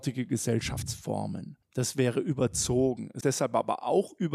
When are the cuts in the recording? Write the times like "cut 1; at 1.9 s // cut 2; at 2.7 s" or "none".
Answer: cut 1; at 3.2 s